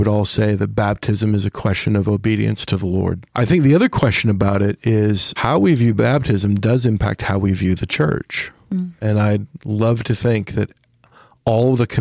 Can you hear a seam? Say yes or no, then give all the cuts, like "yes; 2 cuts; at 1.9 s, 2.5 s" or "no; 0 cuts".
no; 0 cuts